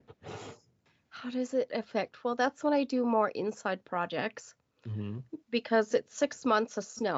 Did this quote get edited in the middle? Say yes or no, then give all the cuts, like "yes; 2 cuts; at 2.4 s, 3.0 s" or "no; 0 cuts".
no; 0 cuts